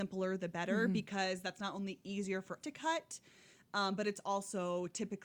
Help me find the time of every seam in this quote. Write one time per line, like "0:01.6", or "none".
0:02.6